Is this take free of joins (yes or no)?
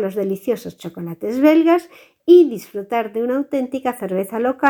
yes